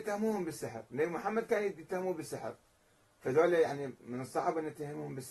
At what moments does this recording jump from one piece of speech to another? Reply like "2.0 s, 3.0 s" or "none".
none